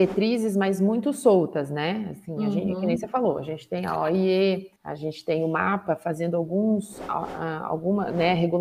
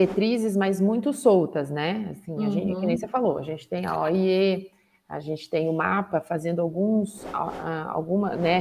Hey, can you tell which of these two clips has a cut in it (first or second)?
first